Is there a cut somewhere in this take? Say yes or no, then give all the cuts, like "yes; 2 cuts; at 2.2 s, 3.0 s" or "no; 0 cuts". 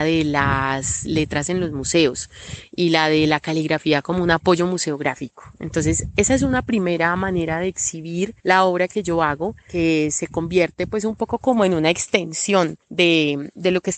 yes; 2 cuts; at 8.4 s, 12.8 s